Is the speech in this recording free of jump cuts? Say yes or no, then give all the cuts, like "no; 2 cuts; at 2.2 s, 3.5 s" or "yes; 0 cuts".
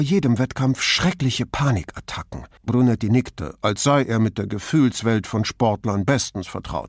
no; 1 cut; at 2.6 s